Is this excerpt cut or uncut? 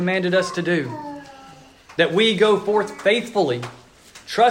uncut